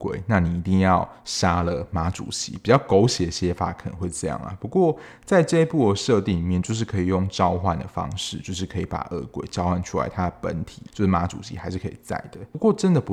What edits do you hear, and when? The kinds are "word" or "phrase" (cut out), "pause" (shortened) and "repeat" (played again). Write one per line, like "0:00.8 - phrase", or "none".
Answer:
0:10.9 - pause